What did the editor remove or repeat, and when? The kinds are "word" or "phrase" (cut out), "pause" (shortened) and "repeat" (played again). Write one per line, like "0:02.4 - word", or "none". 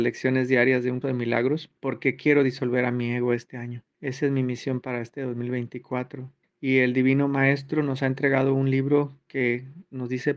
0:01.0 - word
0:01.8 - pause
0:03.9 - pause
0:06.4 - pause

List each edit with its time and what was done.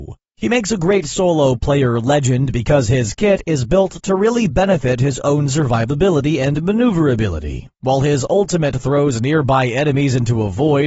none

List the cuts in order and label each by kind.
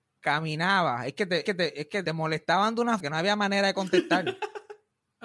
0:01.5 - repeat
0:02.1 - word
0:03.0 - word

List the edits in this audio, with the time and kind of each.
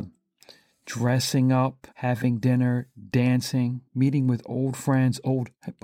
0:01.9 - pause
0:03.9 - pause

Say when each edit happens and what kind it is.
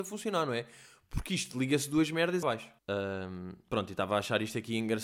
0:02.4 - phrase
0:02.8 - pause

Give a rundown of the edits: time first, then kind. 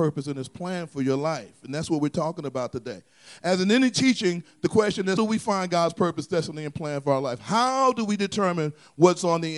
0:05.2 - word

